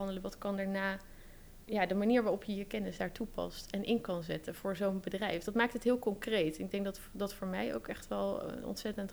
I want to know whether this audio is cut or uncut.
cut